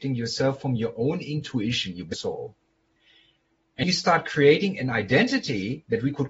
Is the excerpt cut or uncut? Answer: cut